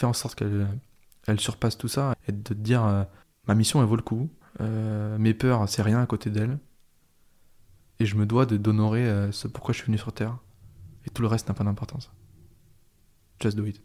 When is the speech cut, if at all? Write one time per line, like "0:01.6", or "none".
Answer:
0:02.1
0:03.2
0:04.4
0:11.0